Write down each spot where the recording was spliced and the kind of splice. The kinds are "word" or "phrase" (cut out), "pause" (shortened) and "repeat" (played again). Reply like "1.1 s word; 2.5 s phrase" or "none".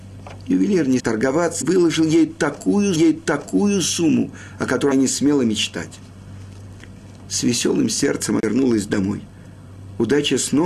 1.0 s word; 1.6 s word; 2.9 s repeat; 4.9 s word; 8.4 s word